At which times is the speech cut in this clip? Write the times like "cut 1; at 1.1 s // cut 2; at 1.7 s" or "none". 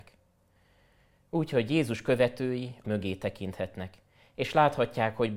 cut 1; at 2.8 s

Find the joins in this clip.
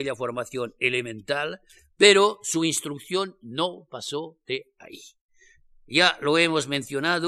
none

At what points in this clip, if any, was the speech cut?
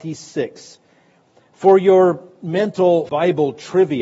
cut 1; at 3.1 s

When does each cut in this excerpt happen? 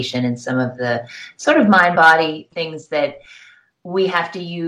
none

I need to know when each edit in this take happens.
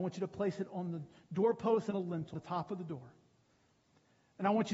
cut 1; at 1.9 s // cut 2; at 2.3 s

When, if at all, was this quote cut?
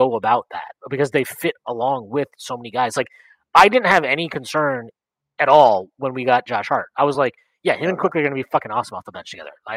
none

